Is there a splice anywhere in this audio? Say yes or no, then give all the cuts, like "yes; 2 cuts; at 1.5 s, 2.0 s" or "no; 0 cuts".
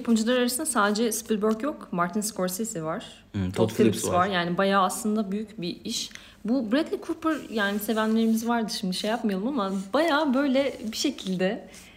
no; 0 cuts